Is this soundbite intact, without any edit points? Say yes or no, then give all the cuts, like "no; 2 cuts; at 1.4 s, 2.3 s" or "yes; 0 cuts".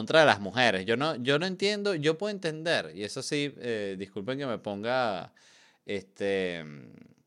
yes; 0 cuts